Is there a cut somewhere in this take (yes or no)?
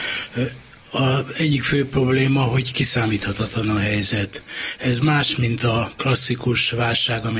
no